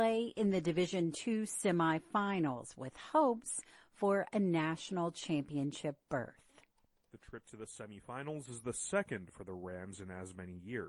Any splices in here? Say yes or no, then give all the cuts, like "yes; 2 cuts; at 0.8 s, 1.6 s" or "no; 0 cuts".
no; 0 cuts